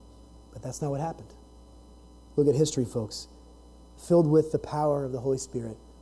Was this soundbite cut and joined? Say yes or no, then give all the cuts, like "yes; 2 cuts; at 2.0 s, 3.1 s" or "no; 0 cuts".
no; 0 cuts